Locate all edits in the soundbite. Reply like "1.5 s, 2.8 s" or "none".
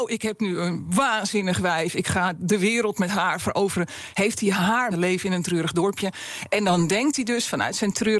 4.9 s